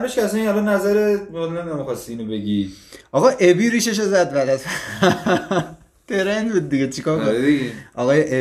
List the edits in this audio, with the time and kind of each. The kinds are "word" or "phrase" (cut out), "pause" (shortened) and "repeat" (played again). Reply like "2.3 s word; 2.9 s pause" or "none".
none